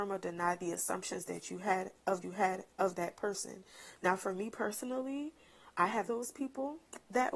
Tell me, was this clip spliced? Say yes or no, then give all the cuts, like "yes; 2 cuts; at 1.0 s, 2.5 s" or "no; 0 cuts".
yes; 3 cuts; at 2.2 s, 5.7 s, 6.1 s